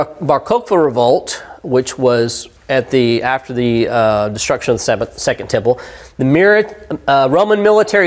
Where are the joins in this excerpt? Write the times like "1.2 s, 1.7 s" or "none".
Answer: 2.6 s